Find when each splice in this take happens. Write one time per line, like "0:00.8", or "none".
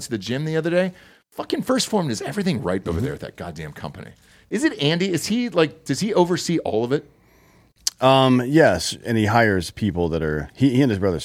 none